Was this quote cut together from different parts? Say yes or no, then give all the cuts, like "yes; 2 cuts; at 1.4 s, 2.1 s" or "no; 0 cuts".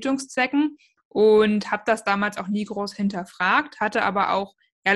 no; 0 cuts